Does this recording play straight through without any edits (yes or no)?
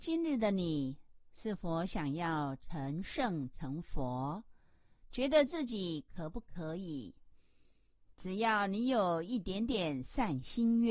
yes